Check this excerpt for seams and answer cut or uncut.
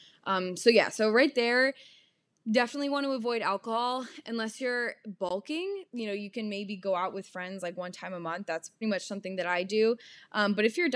cut